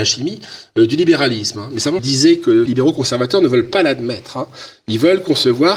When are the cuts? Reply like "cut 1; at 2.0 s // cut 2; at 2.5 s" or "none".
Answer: cut 1; at 2.0 s // cut 2; at 2.7 s